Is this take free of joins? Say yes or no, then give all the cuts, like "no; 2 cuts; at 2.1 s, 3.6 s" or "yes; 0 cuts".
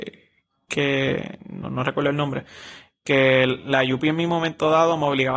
yes; 0 cuts